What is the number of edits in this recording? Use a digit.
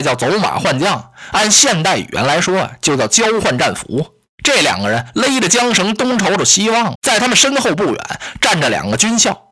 1